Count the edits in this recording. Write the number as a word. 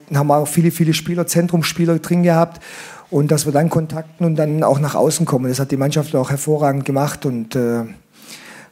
zero